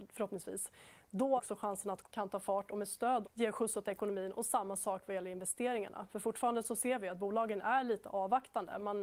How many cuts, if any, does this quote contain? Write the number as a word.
three